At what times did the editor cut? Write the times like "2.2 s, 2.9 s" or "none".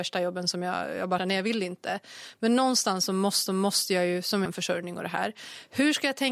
1.2 s, 3.5 s, 4.5 s